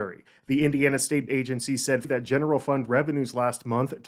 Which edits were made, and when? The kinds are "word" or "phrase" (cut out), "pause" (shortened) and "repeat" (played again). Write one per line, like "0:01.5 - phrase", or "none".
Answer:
0:01.3 - word
0:02.0 - word